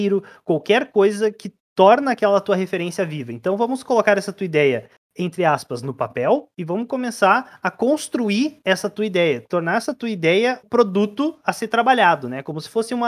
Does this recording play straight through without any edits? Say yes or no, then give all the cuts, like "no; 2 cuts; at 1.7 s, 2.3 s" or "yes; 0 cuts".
no; 1 cut; at 10.6 s